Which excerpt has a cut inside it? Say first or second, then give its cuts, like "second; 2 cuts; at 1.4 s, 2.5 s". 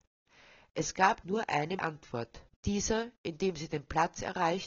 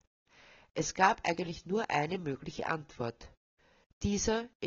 first; 3 cuts; at 1.2 s, 1.8 s, 2.5 s